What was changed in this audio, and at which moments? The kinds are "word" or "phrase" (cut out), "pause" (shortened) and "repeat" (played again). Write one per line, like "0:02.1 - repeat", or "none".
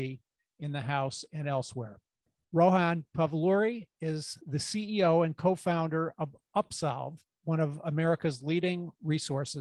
none

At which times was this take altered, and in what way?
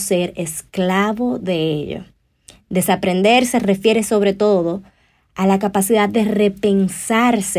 none

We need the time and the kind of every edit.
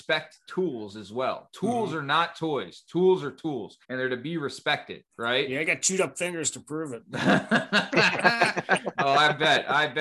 0:03.8 - pause
0:05.1 - pause

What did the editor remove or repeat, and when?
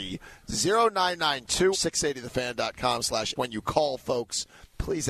0:01.7 - word
0:03.4 - word

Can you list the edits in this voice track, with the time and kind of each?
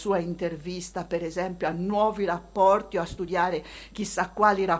none

